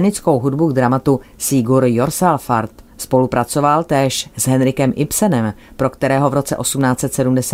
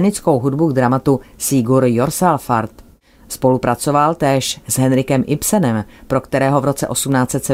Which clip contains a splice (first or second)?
first